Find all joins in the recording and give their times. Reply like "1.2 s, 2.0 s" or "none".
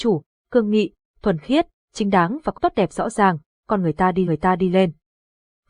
2.6 s, 4.3 s